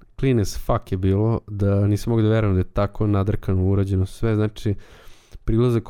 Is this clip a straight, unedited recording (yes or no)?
yes